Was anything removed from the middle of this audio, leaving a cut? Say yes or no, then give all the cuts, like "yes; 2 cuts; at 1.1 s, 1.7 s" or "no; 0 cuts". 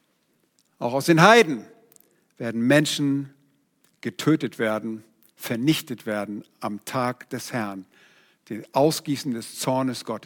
no; 0 cuts